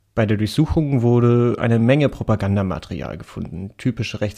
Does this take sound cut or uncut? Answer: uncut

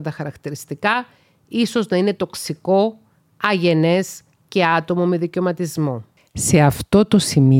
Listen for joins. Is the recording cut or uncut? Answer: uncut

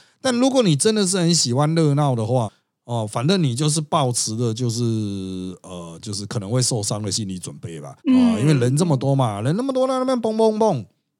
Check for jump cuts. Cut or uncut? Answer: cut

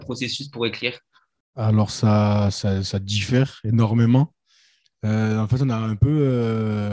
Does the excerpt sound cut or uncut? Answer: uncut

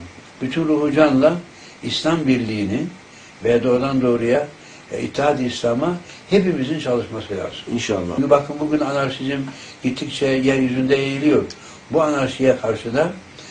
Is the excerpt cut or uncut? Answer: uncut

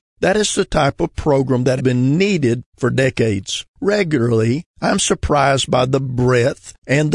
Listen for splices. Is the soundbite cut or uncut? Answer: cut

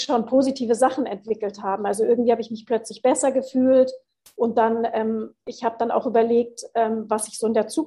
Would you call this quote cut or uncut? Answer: uncut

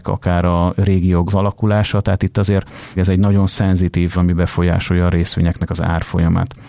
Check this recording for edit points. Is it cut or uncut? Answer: cut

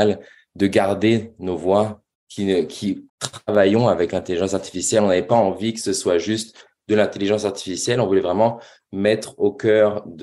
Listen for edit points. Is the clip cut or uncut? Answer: cut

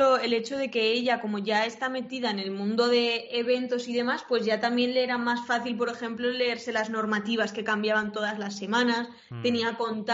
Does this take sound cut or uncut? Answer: uncut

